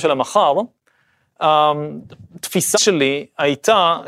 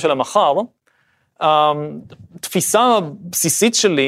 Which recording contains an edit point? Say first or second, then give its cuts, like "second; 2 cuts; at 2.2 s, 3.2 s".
first; 1 cut; at 2.7 s